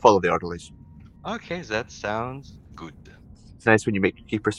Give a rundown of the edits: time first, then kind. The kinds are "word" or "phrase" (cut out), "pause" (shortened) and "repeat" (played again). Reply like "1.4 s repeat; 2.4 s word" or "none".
3.6 s word